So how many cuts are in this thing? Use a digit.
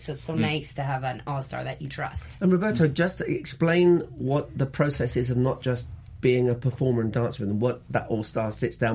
0